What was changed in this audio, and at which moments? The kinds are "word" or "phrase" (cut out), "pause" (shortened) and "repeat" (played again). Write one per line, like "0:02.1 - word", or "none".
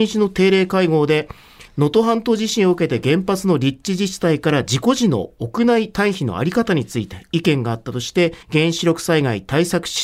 0:01.7 - pause
0:08.4 - pause